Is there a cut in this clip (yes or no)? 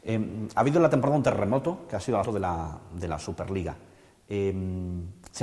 yes